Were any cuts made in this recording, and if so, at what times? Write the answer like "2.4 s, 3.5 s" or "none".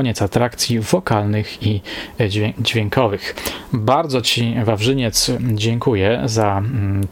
none